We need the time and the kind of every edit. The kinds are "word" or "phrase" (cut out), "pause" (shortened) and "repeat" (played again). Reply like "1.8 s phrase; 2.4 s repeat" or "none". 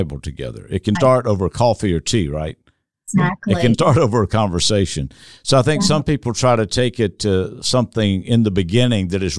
1.0 s word; 3.7 s word

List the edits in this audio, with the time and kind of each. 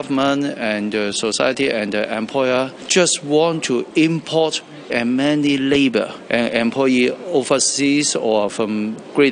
4.9 s word

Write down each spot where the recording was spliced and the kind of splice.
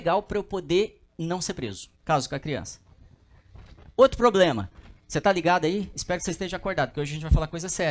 1.1 s pause; 1.9 s pause

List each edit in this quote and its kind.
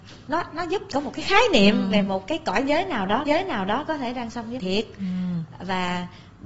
0.9 s word; 3.3 s repeat; 4.3 s word; 4.6 s word

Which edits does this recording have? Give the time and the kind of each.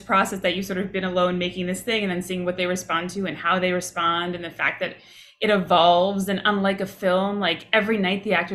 none

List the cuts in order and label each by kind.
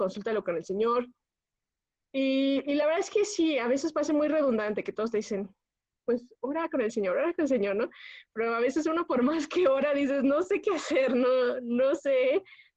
none

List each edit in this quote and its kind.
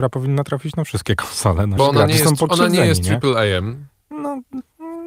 1.8 s word

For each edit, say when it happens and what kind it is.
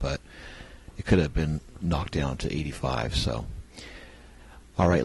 none

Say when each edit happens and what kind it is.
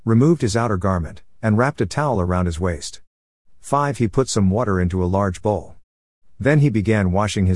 none

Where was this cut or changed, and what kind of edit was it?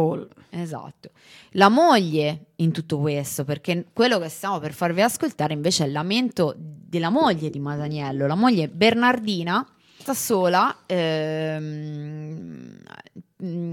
10.1 s word

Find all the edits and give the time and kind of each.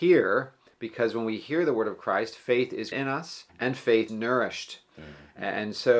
2.9 s word; 3.5 s pause; 4.1 s word

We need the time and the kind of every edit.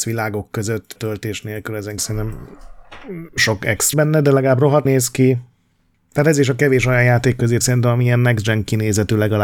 1.0 s word; 2.0 s word; 3.4 s word; 3.9 s word; 4.8 s word; 7.6 s word

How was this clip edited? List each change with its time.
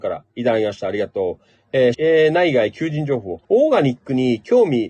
1.9 s word; 3.4 s pause

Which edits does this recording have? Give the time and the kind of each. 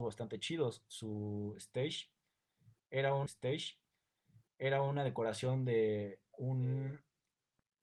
3.3 s repeat

